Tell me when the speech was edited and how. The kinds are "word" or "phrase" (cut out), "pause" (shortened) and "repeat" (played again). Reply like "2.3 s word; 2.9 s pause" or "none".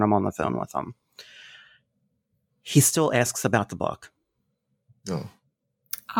none